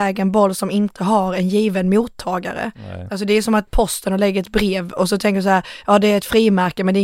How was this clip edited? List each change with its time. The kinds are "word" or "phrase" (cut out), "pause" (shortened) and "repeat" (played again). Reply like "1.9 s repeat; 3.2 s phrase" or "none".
3.7 s phrase